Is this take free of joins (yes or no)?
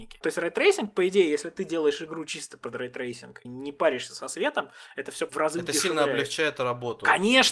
no